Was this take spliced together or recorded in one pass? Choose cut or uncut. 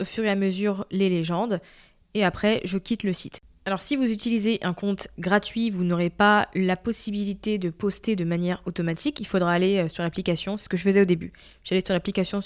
uncut